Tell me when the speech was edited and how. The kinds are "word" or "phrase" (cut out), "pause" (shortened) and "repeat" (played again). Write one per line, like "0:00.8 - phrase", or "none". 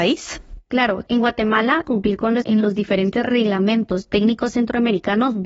0:01.8 - word
0:02.4 - word